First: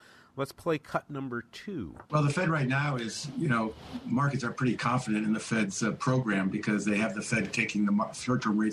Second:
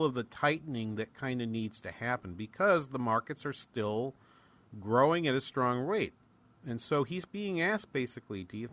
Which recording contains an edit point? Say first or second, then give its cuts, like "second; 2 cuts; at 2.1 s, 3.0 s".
first; 1 cut; at 2.1 s